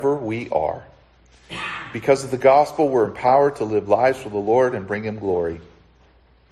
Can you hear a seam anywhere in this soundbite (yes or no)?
no